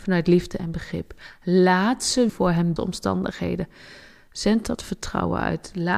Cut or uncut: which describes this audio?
cut